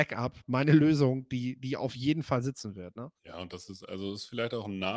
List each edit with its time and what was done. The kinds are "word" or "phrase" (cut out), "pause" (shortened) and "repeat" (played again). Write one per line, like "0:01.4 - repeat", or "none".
0:03.2 - pause